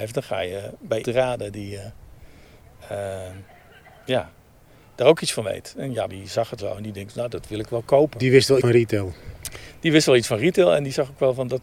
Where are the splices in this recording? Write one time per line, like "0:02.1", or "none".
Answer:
0:01.0
0:06.1
0:06.6
0:08.6